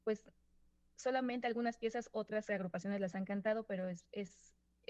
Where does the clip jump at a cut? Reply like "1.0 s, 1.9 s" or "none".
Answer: none